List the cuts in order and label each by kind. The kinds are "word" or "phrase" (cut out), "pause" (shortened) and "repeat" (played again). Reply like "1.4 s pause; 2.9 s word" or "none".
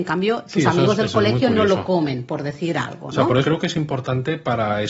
3.4 s word